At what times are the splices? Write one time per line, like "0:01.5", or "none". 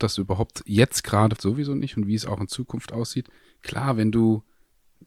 0:01.4
0:03.4